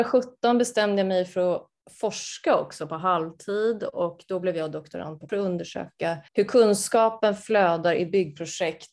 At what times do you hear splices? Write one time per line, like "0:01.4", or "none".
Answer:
0:05.3
0:06.3